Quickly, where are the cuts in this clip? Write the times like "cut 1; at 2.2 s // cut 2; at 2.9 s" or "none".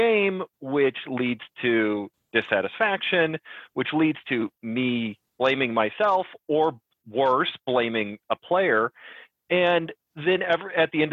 none